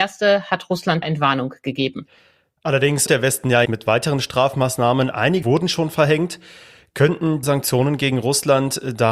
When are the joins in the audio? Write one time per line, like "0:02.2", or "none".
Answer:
0:01.0
0:03.1
0:03.6
0:05.4
0:07.4

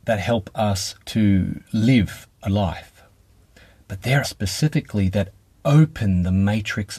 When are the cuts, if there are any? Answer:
0:01.0
0:02.5
0:04.2

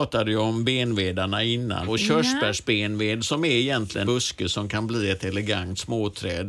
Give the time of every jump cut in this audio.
0:01.9
0:04.1

